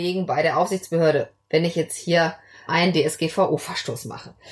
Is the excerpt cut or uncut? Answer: cut